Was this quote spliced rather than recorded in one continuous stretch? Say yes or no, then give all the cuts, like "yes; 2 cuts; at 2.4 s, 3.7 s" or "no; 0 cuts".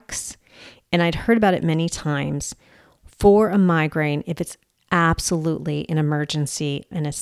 no; 0 cuts